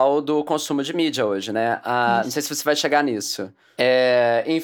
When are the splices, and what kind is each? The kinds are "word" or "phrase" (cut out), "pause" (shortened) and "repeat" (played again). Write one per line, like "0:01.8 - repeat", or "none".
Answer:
none